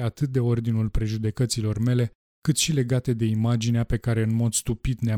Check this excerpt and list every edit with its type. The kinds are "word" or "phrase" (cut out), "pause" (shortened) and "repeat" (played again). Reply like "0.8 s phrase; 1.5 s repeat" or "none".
none